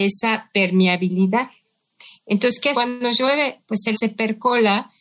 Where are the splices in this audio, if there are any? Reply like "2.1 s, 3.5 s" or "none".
2.7 s, 3.9 s